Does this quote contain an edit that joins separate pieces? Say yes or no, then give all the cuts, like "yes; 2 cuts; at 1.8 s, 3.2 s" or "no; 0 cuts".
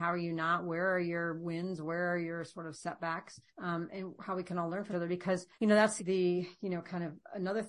yes; 4 cuts; at 3.5 s, 4.9 s, 5.5 s, 6.0 s